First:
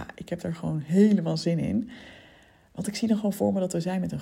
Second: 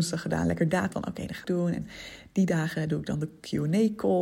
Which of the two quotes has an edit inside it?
second; 2 cuts; at 0.9 s, 1.4 s

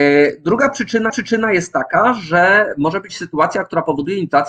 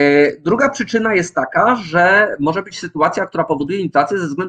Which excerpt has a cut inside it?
first; 1 cut; at 1.1 s

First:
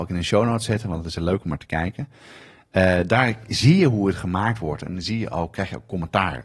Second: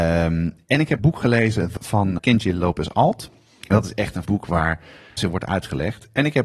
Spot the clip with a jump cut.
second; 5 cuts; at 1.0 s, 1.8 s, 2.2 s, 4.2 s, 5.2 s

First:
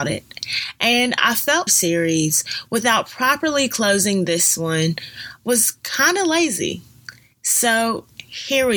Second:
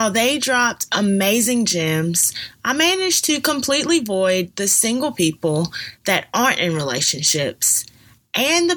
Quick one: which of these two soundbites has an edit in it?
first; 1 cut; at 1.7 s

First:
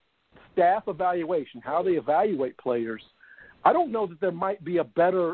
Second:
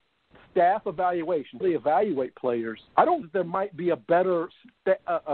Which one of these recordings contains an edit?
second; 3 cuts; at 1.6 s, 2.9 s, 3.2 s

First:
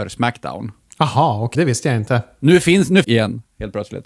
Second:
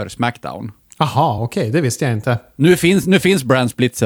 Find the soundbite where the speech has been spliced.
first; 2 cuts; at 1.5 s, 3.0 s

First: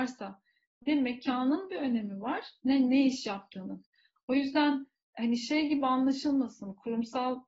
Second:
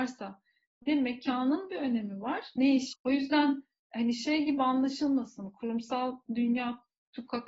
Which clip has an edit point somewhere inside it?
second; 2 cuts; at 2.6 s, 2.9 s

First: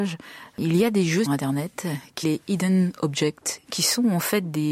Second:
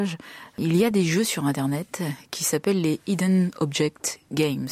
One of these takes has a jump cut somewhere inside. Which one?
first; 3 cuts; at 1.2 s, 2.2 s, 3.7 s

